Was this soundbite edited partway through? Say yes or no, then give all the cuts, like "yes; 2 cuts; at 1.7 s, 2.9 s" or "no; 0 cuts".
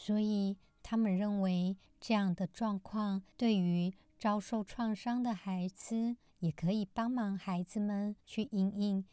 yes; 1 cut; at 8.2 s